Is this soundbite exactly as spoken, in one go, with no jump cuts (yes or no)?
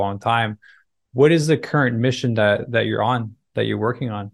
yes